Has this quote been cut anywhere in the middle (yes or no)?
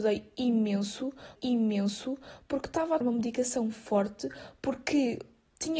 yes